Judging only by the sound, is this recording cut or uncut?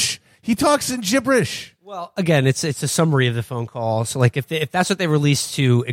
uncut